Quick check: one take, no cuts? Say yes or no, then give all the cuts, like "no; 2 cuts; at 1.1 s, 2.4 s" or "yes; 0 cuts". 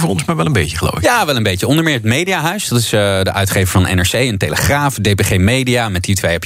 yes; 0 cuts